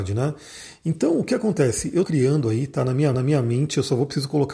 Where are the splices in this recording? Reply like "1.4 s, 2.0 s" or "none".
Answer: 2.0 s, 3.1 s